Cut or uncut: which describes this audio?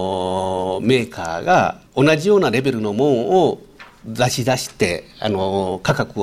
cut